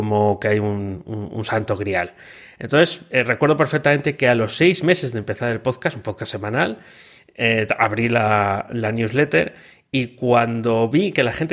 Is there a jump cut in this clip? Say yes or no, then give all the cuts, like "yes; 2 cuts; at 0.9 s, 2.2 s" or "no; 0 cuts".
no; 0 cuts